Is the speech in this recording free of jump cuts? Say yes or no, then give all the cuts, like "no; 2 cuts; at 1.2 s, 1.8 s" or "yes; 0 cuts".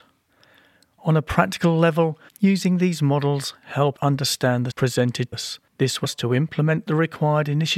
no; 6 cuts; at 2.3 s, 4.0 s, 4.7 s, 5.3 s, 5.7 s, 6.0 s